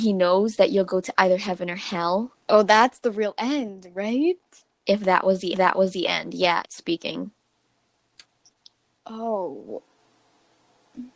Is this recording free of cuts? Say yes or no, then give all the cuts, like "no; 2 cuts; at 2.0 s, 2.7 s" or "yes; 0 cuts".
no; 3 cuts; at 2.4 s, 5.5 s, 6.6 s